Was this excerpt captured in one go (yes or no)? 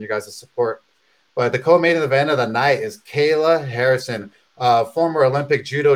yes